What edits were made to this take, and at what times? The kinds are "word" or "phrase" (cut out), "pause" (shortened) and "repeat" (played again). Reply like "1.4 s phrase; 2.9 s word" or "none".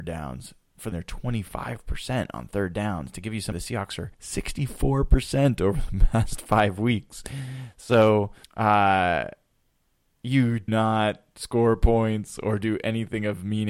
0.9 s word; 3.5 s word; 4.1 s pause; 8.4 s pause; 10.7 s word